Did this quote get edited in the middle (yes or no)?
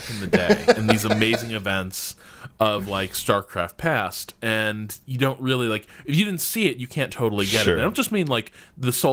no